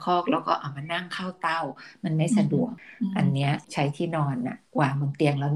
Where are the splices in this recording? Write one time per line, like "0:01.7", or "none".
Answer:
0:03.6